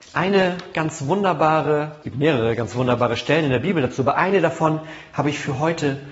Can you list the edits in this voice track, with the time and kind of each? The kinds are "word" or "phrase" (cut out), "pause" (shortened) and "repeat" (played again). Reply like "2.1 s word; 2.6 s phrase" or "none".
2.0 s word